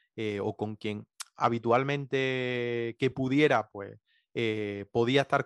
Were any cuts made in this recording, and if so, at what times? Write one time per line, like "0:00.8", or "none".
none